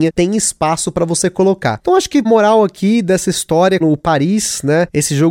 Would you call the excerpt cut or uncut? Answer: cut